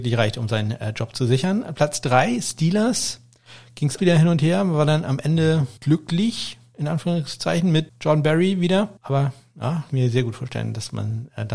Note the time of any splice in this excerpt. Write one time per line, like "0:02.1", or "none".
0:04.0
0:05.8
0:07.9
0:09.9